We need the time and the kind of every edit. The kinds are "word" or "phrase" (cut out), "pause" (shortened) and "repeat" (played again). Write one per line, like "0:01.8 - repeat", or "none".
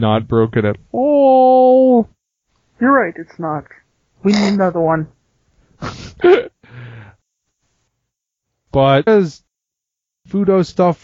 0:09.1 - word